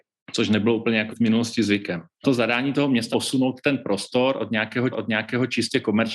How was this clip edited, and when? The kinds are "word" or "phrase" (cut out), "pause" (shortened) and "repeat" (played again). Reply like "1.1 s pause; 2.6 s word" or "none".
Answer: 1.1 s word; 3.1 s word; 4.9 s repeat

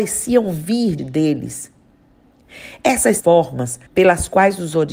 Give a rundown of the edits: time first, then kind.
1.0 s word; 3.2 s phrase; 3.9 s pause

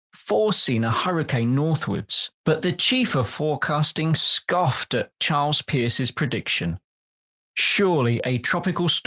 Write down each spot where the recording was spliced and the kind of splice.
2.4 s pause

